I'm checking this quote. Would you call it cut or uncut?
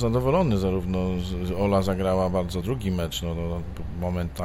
cut